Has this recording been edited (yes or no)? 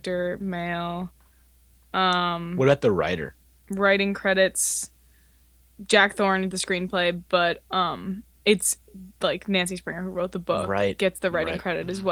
yes